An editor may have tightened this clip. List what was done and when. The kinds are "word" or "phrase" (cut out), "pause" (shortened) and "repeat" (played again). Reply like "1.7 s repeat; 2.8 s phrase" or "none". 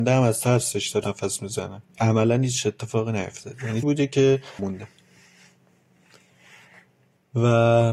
1.0 s word; 1.9 s pause; 3.8 s word; 4.6 s word